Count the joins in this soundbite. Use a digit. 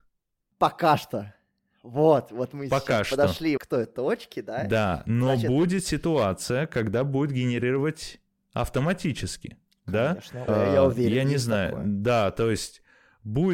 2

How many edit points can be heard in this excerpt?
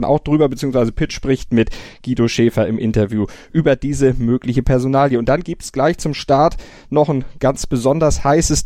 0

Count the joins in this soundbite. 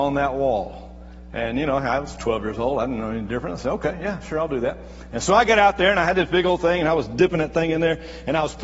0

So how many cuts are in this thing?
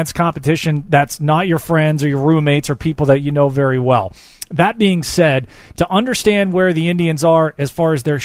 0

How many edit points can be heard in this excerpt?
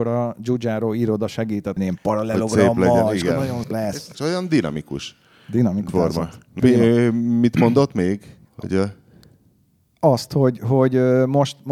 6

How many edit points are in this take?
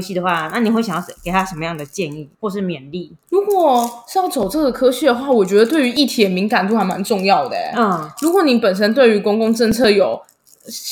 3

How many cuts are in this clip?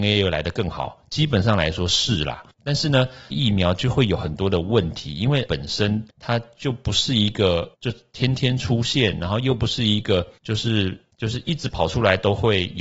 4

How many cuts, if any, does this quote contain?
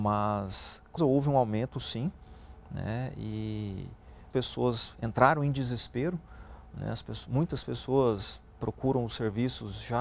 2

